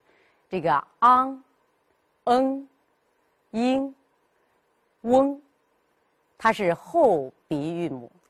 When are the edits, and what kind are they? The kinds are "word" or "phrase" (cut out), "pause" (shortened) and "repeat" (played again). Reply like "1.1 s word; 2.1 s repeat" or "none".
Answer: none